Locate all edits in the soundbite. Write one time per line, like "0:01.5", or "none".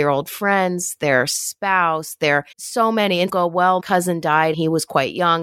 0:02.5
0:03.3
0:03.8
0:04.5